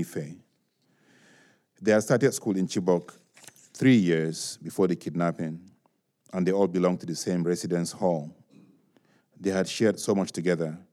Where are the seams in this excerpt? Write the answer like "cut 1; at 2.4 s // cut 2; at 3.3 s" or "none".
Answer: none